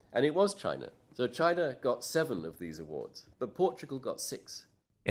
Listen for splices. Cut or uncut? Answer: cut